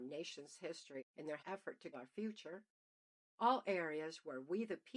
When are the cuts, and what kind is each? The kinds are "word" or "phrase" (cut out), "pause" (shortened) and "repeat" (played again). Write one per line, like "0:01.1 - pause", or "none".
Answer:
0:01.0 - word
0:01.4 - word
0:01.9 - word